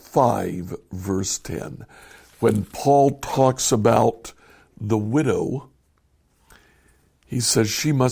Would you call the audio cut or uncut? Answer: uncut